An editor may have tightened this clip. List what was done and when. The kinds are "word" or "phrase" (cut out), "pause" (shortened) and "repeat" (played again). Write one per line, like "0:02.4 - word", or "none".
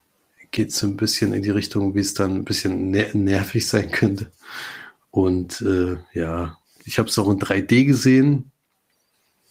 none